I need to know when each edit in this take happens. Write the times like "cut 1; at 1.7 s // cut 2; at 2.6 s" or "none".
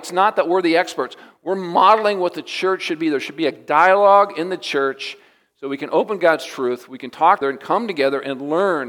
cut 1; at 7.4 s